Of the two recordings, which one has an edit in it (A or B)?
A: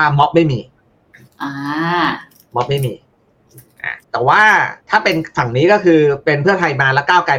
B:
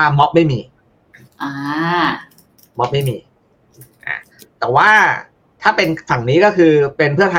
A